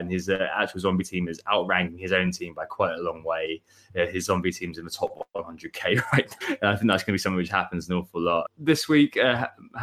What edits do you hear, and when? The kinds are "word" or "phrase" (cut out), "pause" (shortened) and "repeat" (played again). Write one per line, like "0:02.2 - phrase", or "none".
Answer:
0:06.4 - word